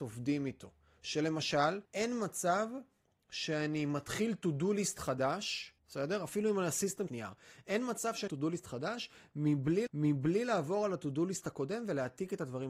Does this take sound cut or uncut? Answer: cut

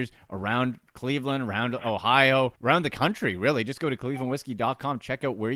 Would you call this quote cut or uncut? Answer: cut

